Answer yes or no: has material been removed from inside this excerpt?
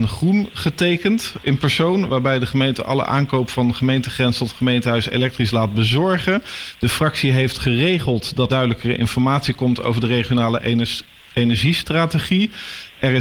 yes